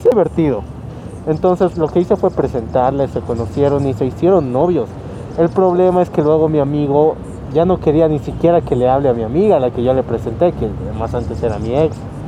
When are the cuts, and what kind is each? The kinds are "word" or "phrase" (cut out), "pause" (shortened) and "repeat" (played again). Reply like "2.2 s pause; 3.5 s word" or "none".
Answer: none